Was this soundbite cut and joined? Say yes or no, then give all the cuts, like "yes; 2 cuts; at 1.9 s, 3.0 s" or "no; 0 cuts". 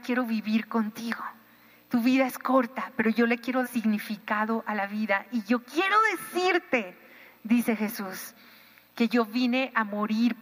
yes; 1 cut; at 3.6 s